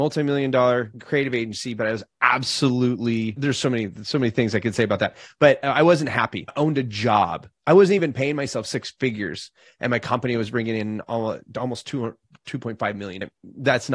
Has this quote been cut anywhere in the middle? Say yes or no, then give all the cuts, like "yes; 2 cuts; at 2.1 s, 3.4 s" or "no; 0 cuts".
no; 0 cuts